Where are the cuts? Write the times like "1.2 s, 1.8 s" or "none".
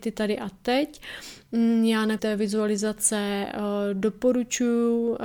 2.2 s